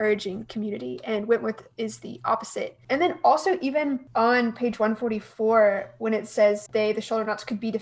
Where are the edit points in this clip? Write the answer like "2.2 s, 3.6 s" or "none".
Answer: 6.7 s